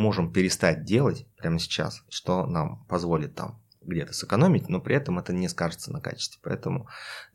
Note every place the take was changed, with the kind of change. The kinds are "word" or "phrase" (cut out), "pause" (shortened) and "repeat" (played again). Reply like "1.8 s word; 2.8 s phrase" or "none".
1.3 s pause